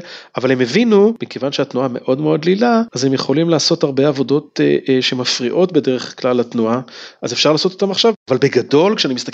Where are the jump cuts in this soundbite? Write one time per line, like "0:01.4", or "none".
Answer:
none